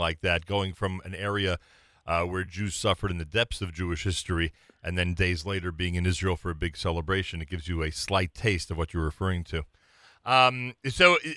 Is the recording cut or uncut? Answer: uncut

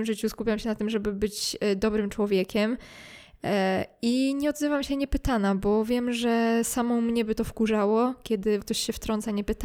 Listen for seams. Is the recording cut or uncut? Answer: cut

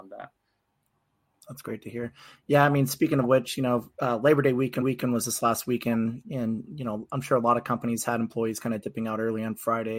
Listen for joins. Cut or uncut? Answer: cut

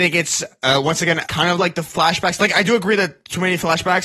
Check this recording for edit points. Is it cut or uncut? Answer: cut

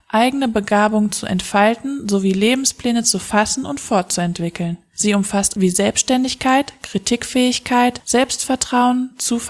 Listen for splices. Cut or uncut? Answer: cut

